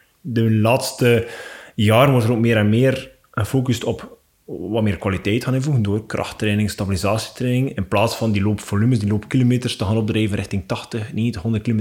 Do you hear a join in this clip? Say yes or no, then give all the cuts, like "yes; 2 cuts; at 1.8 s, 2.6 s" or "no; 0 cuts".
no; 0 cuts